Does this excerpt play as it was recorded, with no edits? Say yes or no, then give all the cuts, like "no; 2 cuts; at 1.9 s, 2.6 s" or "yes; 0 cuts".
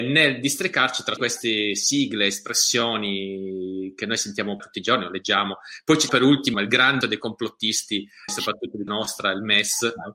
no; 7 cuts; at 1.2 s, 4.6 s, 6.1 s, 6.5 s, 7.0 s, 8.3 s, 8.9 s